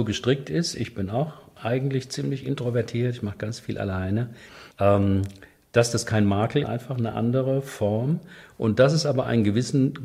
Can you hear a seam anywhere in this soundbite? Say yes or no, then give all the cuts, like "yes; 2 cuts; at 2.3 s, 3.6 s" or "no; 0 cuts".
yes; 2 cuts; at 4.7 s, 6.6 s